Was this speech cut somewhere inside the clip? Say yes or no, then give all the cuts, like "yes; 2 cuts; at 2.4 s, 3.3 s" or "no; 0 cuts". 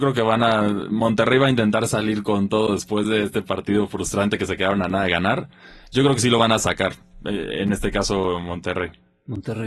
no; 0 cuts